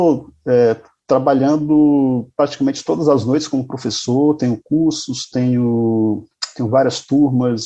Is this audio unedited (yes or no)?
yes